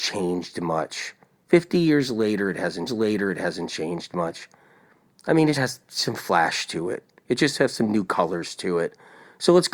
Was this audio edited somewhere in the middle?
yes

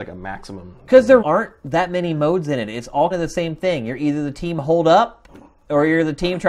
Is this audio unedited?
no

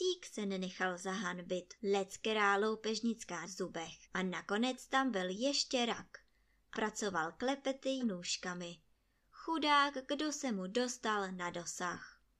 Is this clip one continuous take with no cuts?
no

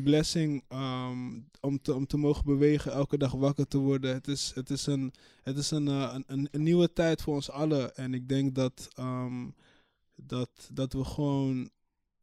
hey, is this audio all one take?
yes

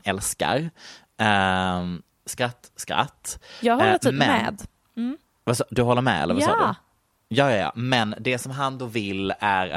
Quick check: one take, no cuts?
yes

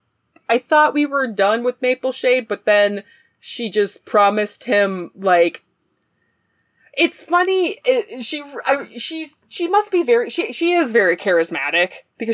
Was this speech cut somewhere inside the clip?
no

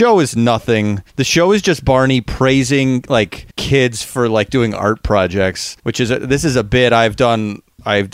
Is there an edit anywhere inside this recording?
yes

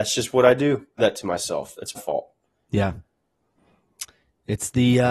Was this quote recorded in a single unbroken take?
no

